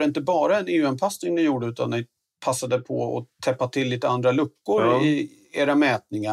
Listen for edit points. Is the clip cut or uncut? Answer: uncut